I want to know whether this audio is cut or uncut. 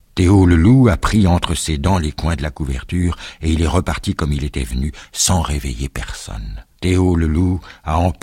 cut